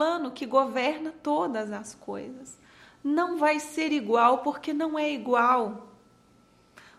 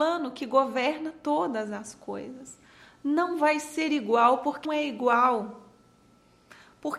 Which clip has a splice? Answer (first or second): second